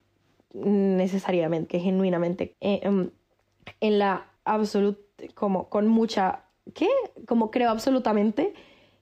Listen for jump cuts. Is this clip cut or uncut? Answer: cut